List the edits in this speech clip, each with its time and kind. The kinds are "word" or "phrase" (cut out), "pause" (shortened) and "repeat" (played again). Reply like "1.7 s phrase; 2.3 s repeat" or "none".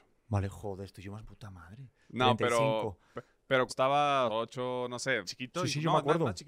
1.2 s word; 3.7 s word; 4.3 s phrase; 5.2 s word